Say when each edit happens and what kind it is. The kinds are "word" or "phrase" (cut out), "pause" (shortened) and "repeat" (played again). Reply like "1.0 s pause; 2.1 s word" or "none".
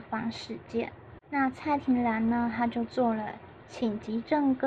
1.2 s pause